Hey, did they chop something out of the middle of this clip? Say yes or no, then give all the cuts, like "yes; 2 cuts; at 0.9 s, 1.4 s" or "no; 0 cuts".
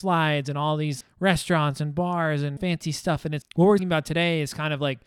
yes; 4 cuts; at 1.0 s, 2.6 s, 3.4 s, 3.8 s